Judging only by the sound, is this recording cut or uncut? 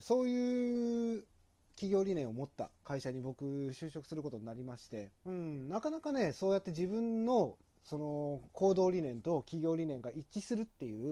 cut